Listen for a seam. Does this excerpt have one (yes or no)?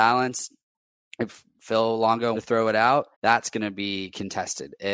yes